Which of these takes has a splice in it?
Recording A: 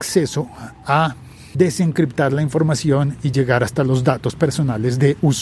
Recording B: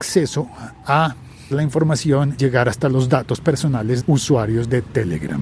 B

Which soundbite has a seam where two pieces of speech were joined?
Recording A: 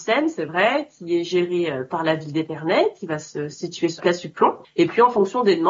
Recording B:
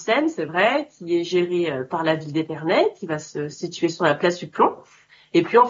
A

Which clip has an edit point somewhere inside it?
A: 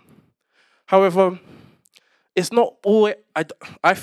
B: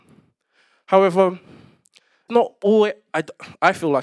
B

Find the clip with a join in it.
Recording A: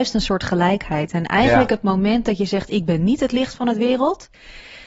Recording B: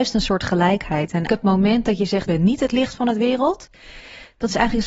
B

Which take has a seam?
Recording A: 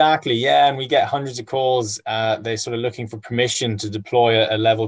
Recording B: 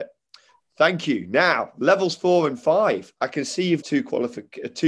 B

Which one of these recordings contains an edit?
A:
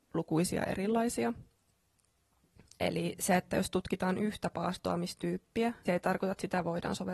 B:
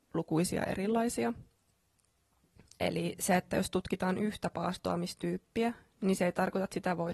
A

